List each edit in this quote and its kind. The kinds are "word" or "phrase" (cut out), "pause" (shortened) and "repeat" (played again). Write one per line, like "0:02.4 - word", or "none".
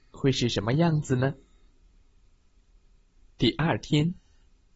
none

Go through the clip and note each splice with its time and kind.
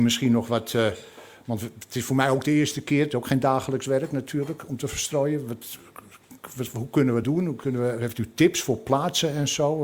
0:07.2 - word

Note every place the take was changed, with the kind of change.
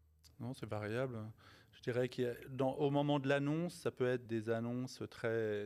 0:04.3 - word

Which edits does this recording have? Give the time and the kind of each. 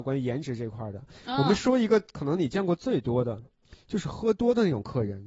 none

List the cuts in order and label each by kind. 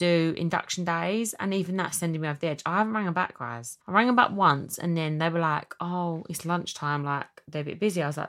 0:03.8 - pause

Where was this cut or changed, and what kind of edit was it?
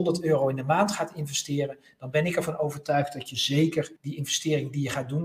0:04.0 - pause

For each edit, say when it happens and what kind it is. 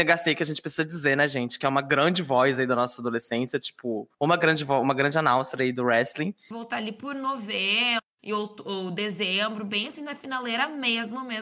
0:04.1 - pause

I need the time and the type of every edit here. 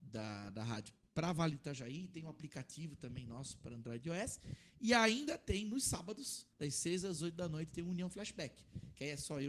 0:06.5 - pause

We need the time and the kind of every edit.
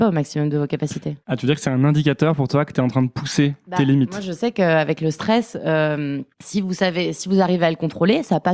0:01.2 - pause
0:06.3 - pause

